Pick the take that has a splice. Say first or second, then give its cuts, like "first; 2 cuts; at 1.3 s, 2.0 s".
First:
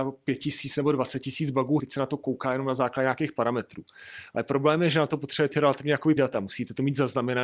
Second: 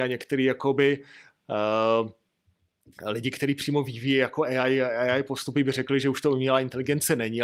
first; 3 cuts; at 1.8 s, 5.5 s, 6.2 s